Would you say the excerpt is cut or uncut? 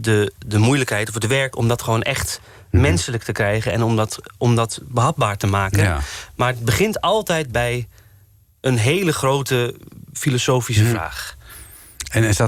uncut